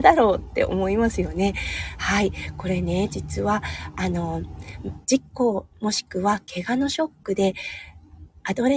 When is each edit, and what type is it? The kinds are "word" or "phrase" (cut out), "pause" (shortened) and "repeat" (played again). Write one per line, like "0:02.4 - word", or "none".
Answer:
0:05.0 - pause